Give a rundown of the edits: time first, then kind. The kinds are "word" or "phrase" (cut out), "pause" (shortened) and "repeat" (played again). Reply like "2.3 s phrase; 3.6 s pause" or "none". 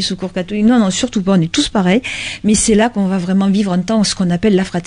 none